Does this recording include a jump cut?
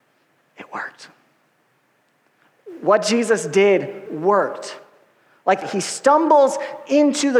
yes; 2 cuts; at 4.1 s, 5.6 s

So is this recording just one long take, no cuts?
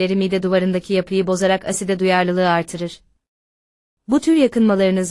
yes; 0 cuts

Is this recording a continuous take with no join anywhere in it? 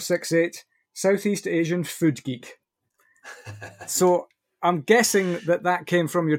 yes; 0 cuts

